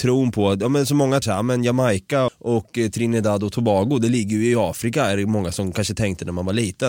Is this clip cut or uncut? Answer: cut